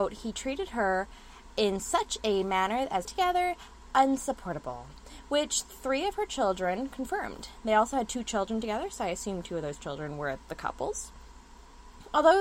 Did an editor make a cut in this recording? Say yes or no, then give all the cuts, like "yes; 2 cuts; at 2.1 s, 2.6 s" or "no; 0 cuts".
yes; 1 cut; at 3.0 s